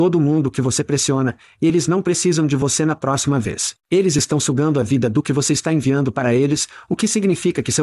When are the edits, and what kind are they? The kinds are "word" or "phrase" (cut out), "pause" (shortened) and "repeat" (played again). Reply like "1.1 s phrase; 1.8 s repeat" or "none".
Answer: 3.8 s pause